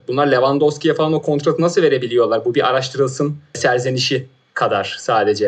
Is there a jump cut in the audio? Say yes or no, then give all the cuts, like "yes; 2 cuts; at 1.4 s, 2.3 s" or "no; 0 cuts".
no; 0 cuts